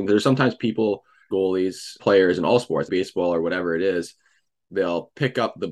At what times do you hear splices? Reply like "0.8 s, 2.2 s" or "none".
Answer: 1.3 s, 2.0 s, 2.9 s